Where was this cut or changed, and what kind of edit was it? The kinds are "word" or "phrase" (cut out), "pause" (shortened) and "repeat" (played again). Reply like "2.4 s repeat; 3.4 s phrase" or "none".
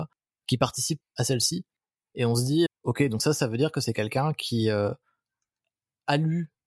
2.7 s word